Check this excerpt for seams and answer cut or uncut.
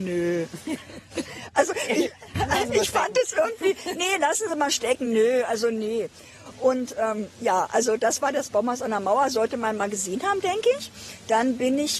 uncut